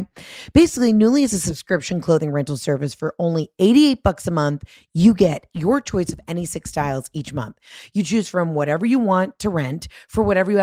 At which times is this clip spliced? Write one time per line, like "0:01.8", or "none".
none